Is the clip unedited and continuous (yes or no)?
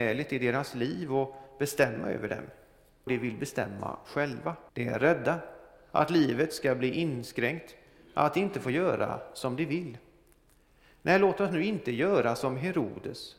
no